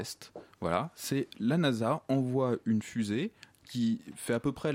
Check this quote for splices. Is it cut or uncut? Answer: uncut